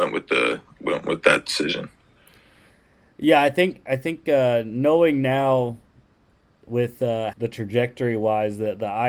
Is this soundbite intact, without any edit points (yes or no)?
no